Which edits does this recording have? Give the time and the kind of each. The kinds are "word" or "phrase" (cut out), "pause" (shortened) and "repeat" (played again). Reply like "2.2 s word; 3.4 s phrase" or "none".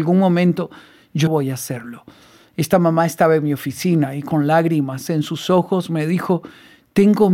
1.3 s word